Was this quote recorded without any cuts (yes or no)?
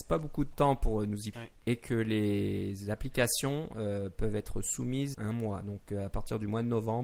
no